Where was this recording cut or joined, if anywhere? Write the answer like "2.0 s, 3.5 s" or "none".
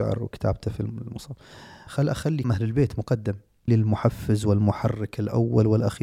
1.9 s, 2.4 s, 3.7 s